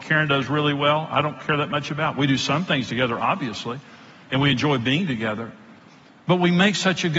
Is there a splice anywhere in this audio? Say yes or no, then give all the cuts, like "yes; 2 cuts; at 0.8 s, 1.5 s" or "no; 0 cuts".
no; 0 cuts